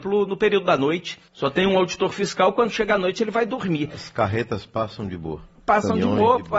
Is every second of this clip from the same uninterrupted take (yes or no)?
no